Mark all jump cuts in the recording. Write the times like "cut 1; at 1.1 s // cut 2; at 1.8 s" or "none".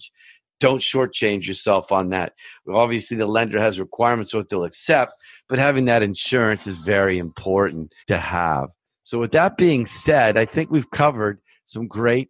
cut 1; at 8.0 s